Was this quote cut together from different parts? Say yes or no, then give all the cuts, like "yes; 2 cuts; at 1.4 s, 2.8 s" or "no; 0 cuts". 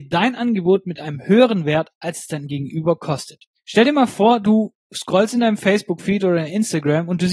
no; 0 cuts